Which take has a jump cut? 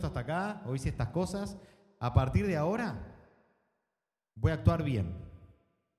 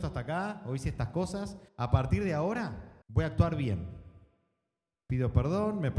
second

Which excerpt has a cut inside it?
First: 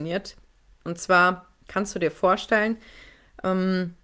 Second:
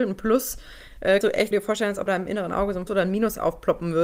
second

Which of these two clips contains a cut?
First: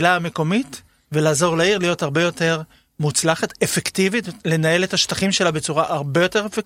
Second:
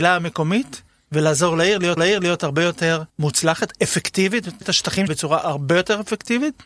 second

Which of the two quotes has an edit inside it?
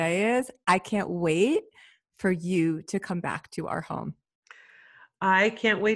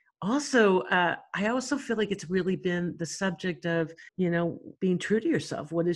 second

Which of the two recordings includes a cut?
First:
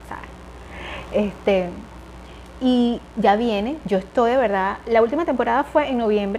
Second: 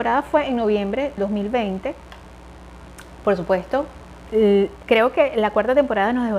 second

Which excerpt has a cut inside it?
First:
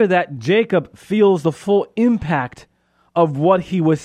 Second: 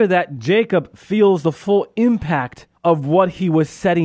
second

